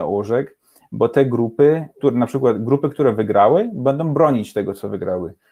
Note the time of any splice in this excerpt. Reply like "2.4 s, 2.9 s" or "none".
none